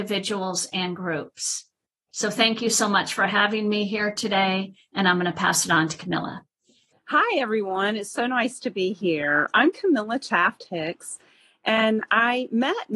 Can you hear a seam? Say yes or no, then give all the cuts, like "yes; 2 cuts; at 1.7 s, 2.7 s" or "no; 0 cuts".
no; 0 cuts